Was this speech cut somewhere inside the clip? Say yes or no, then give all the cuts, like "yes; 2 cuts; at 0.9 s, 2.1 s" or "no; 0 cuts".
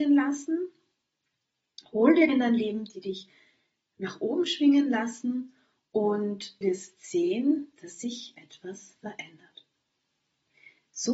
yes; 2 cuts; at 2.3 s, 6.6 s